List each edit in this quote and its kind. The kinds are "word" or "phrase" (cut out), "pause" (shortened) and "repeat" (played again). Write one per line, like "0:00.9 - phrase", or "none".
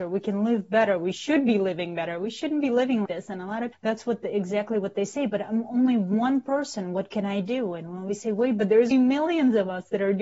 0:03.1 - word
0:03.7 - word
0:08.9 - word

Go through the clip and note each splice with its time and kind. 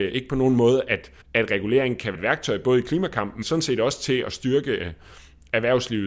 0:01.2 - pause
0:02.1 - word
0:03.4 - word

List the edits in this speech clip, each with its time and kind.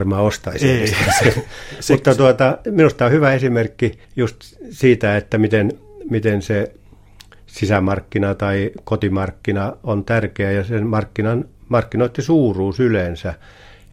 0:04.0 - pause

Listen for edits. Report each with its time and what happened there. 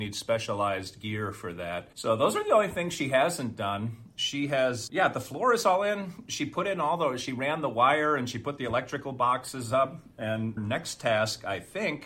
0:01.9 - pause
0:04.9 - word
0:10.6 - word

